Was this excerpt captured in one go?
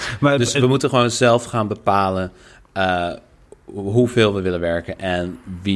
yes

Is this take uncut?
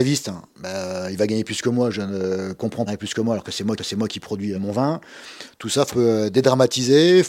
no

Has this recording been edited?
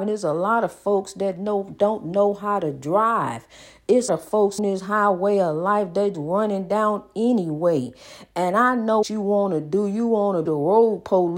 yes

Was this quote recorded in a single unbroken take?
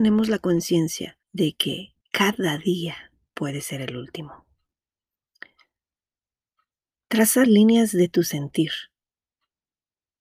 no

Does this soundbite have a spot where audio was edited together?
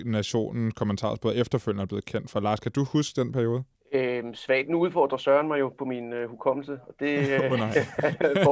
no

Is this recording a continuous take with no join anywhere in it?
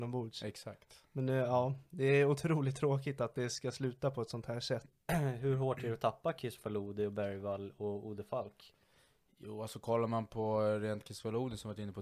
yes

